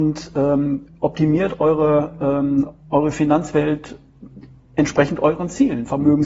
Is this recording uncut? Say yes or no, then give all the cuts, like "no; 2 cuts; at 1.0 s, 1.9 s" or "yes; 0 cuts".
yes; 0 cuts